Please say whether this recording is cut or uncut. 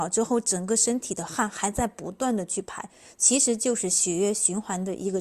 uncut